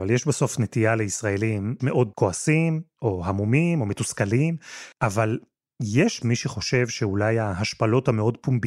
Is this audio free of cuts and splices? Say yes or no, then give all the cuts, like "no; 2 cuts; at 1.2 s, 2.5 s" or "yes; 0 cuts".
no; 4 cuts; at 1.8 s, 2.1 s, 4.9 s, 6.2 s